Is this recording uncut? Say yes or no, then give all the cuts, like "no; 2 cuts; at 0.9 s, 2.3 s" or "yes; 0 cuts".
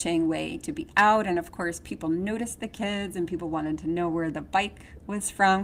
yes; 0 cuts